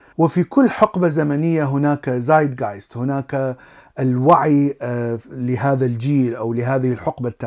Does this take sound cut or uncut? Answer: uncut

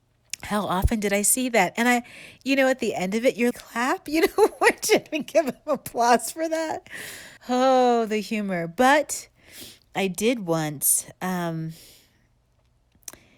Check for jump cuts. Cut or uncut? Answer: cut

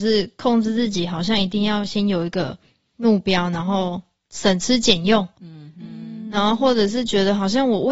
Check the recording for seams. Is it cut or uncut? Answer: uncut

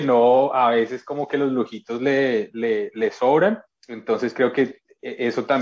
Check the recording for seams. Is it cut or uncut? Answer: cut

